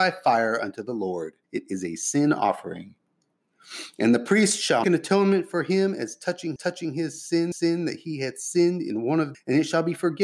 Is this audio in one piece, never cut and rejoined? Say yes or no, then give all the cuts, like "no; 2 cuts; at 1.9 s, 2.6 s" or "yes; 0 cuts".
no; 5 cuts; at 1.4 s, 4.8 s, 6.6 s, 7.5 s, 9.3 s